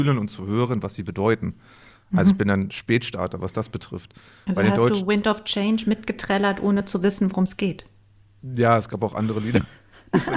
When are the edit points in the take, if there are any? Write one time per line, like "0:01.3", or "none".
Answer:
none